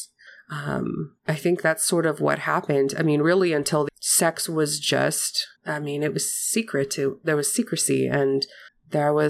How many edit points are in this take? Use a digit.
3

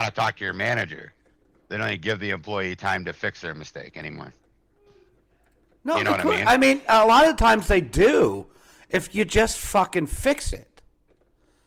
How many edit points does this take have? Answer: 0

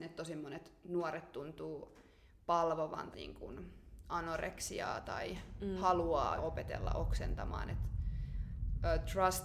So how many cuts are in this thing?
2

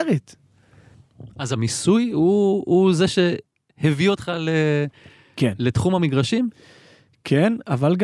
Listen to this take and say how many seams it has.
0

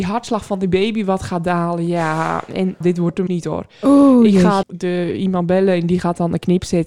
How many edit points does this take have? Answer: 3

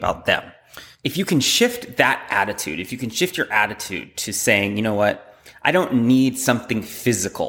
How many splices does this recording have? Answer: 0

